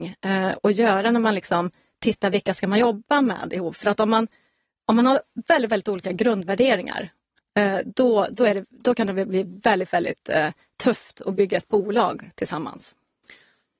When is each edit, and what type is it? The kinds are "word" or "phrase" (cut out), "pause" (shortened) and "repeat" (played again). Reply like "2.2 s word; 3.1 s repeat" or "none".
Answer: none